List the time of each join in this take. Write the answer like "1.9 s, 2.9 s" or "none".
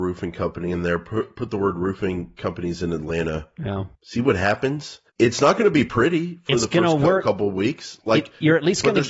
3.9 s, 5.1 s